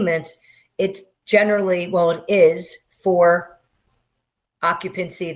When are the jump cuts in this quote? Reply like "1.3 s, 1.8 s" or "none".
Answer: none

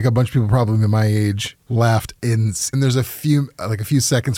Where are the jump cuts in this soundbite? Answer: 1.6 s, 2.7 s

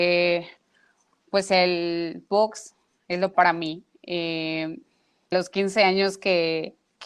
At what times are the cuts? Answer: 3.3 s, 5.3 s

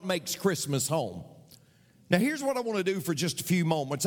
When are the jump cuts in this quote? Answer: none

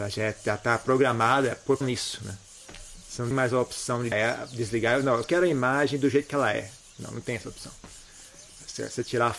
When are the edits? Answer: 1.8 s, 3.3 s, 4.1 s, 5.2 s

